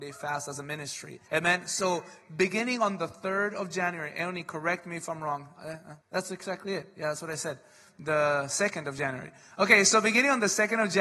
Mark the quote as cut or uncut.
cut